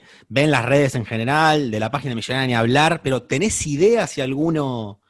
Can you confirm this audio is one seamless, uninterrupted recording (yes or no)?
yes